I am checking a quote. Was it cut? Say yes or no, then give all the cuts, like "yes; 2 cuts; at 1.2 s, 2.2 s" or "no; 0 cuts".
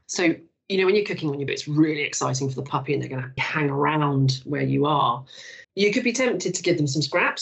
yes; 3 cuts; at 1.5 s, 3.4 s, 5.6 s